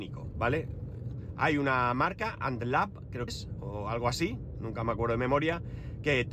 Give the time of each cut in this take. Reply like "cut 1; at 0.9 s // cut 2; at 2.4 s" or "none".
cut 1; at 3.3 s